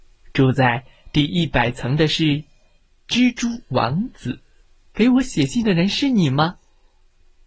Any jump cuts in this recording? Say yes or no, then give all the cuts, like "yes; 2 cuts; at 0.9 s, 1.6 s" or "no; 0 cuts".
yes; 1 cut; at 4.6 s